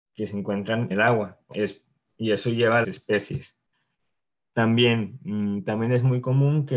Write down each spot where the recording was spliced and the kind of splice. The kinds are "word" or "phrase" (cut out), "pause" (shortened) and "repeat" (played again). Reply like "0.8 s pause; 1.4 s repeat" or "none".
0.9 s word; 1.5 s word; 2.8 s phrase